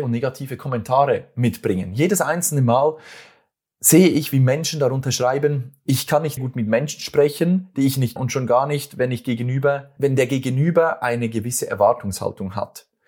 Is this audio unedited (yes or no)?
no